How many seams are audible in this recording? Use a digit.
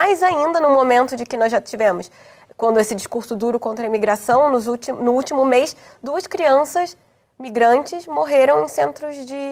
0